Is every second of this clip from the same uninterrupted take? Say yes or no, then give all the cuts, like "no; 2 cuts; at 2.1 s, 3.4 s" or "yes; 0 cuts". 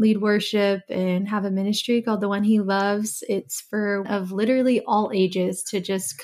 no; 1 cut; at 4.0 s